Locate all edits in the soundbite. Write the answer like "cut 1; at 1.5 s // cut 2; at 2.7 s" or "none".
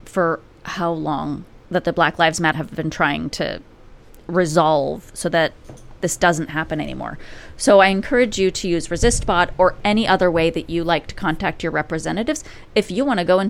cut 1; at 1.7 s // cut 2; at 2.5 s